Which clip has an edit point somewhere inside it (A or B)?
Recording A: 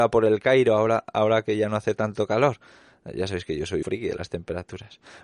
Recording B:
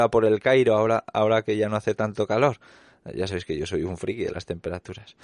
A